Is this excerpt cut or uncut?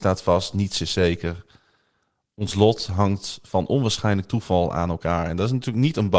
uncut